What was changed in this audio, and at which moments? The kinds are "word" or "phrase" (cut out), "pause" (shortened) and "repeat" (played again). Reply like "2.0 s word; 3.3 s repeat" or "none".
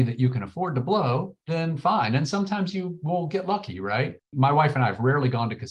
1.4 s pause